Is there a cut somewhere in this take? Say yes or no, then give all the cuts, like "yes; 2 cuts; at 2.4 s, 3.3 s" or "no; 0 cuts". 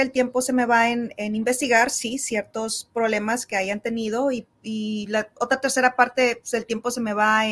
no; 0 cuts